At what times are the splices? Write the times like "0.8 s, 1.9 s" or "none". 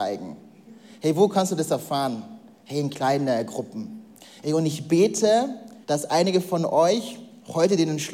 5.8 s